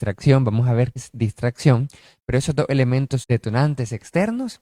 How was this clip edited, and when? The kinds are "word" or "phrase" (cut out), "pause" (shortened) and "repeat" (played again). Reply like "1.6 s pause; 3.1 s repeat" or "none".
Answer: 1.0 s word; 3.2 s word